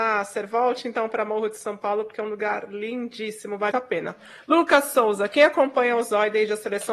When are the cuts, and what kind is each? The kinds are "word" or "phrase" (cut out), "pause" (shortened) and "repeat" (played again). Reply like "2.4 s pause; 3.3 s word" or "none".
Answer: 3.7 s word